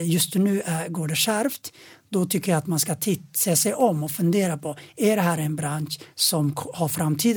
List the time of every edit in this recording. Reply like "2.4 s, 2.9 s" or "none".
none